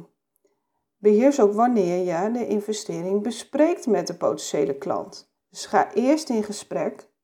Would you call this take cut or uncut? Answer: cut